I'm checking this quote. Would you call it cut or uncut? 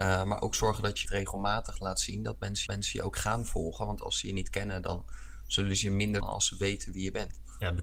cut